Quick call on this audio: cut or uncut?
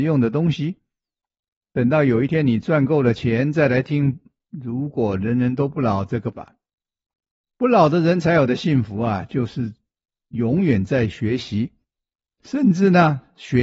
cut